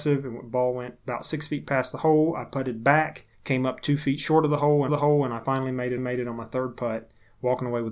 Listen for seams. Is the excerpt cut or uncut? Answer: cut